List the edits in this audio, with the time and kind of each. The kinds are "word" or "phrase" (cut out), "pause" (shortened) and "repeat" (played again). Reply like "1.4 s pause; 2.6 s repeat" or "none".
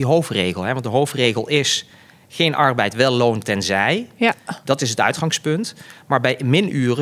none